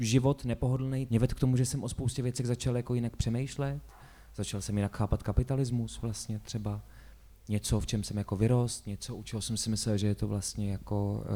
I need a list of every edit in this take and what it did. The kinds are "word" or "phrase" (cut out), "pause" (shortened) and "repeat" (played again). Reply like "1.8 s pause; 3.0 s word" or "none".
1.1 s word